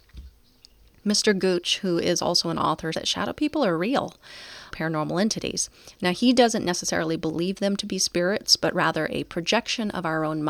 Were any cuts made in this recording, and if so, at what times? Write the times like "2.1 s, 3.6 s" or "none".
2.9 s, 4.7 s